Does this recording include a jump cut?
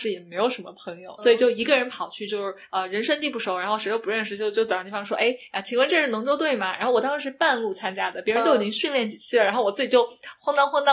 yes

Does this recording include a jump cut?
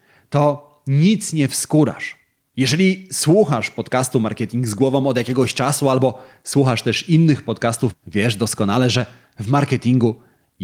yes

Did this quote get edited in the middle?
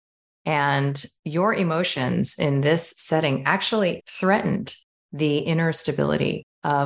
yes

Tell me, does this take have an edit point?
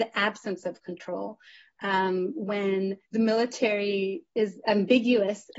yes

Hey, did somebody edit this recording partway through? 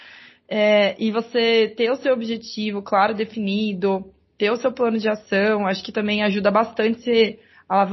no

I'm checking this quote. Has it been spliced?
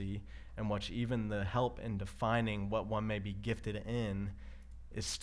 no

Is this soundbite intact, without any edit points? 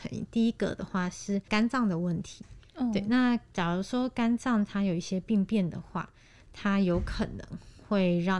yes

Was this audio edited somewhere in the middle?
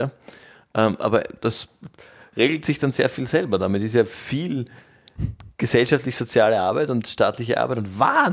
no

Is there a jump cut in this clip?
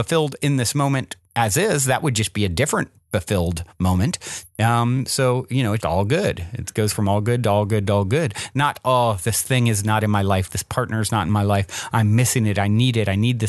yes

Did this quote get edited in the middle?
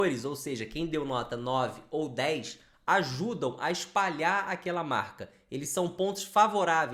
no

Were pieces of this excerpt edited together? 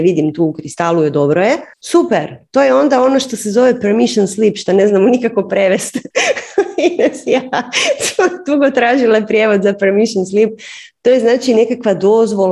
yes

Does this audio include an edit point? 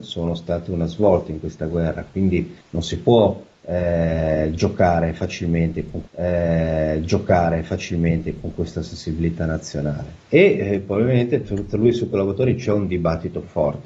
yes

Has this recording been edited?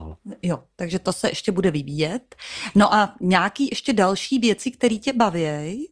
no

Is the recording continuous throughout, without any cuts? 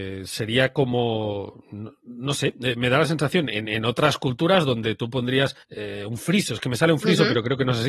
no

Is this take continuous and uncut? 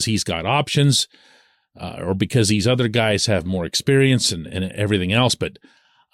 yes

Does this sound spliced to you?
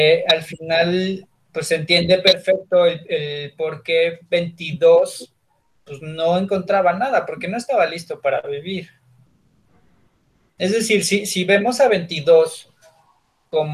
no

